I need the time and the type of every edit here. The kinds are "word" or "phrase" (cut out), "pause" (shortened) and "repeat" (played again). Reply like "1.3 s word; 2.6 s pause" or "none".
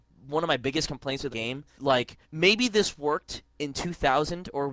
1.3 s word; 1.7 s word; 2.2 s pause